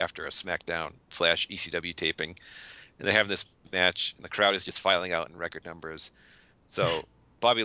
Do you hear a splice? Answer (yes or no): no